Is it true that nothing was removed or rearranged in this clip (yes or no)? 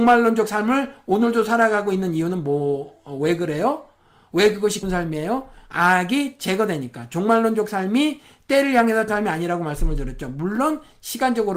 no